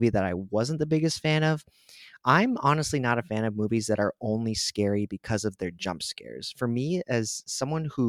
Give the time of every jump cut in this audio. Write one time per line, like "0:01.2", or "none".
none